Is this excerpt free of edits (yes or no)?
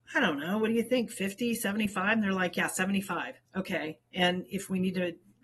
no